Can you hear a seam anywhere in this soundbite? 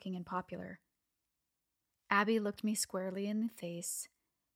no; 0 cuts

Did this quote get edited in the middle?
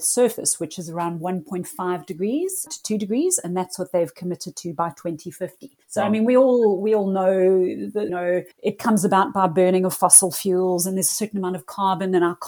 yes; 4 cuts; at 2.7 s, 5.8 s, 8.1 s, 8.5 s

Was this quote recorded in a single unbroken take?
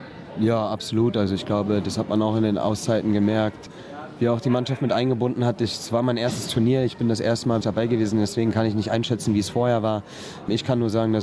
no; 1 cut; at 7.6 s

